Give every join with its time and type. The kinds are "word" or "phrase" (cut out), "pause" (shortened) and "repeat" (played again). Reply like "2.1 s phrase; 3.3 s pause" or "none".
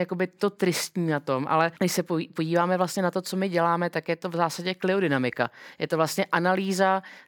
1.8 s pause